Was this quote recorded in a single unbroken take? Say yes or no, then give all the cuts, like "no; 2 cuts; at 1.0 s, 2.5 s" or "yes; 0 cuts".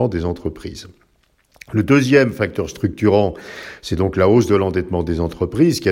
yes; 0 cuts